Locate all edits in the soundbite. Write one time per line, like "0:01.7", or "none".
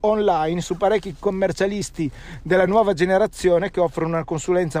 none